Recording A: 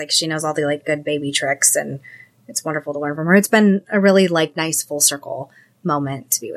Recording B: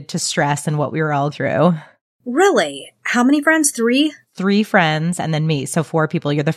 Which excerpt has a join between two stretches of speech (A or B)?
B